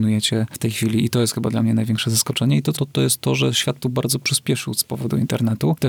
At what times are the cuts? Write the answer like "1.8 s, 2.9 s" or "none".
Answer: 2.8 s, 3.8 s